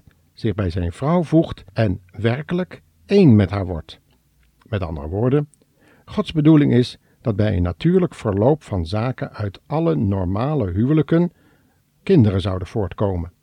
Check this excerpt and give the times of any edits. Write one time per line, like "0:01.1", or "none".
0:01.7